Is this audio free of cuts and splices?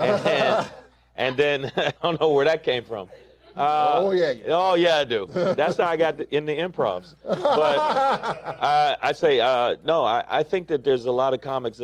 no; 1 cut; at 2.0 s

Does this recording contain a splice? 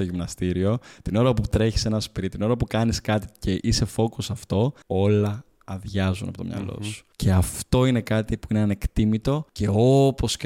yes; 3 cuts; at 4.8 s, 7.1 s, 9.5 s

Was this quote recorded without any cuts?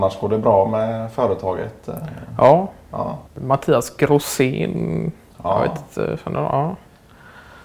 no; 2 cuts; at 3.3 s, 5.3 s

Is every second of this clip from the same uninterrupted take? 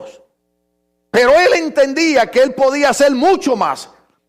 yes; 0 cuts

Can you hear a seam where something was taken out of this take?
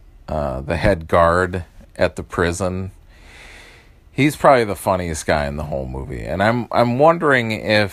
no; 0 cuts

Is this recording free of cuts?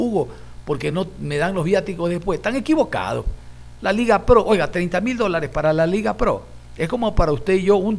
yes; 0 cuts

